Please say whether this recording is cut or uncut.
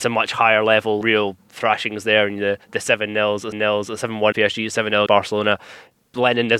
cut